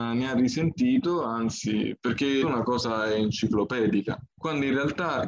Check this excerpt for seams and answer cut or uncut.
cut